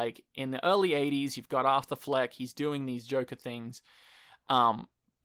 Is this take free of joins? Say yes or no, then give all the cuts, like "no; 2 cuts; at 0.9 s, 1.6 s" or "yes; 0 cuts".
yes; 0 cuts